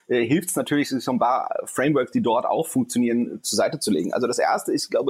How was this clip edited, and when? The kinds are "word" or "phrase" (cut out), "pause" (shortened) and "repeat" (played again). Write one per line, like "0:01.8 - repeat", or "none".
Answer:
none